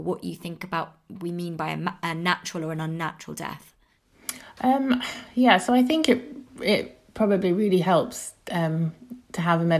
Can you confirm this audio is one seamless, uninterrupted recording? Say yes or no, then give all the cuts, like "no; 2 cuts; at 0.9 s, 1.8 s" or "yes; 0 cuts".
yes; 0 cuts